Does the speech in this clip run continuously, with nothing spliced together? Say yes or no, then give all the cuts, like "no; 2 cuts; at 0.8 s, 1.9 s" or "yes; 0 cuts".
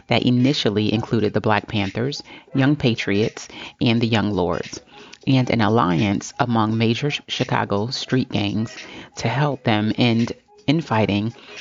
yes; 0 cuts